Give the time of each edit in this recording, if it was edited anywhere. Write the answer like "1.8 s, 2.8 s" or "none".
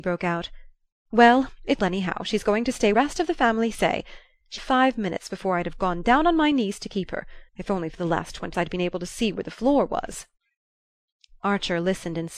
1.8 s, 2.9 s, 4.6 s, 7.5 s, 8.5 s